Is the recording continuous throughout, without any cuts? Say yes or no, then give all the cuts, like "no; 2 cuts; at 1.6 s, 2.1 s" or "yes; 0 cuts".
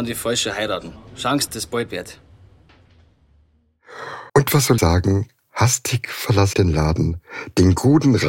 no; 5 cuts; at 1.5 s, 1.9 s, 4.3 s, 4.8 s, 6.5 s